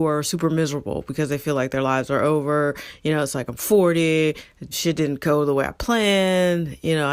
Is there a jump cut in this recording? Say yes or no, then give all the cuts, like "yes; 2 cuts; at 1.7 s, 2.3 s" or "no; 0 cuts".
yes; 1 cut; at 4.7 s